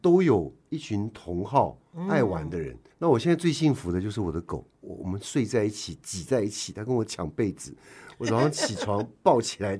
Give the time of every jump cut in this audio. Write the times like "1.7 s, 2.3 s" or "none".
2.9 s